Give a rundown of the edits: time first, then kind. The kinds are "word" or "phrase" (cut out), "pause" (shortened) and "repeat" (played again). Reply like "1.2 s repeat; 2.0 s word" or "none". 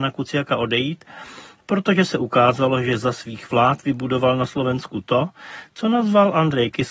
none